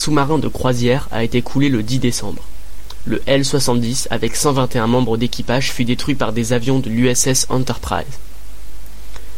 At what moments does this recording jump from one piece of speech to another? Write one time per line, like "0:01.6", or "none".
none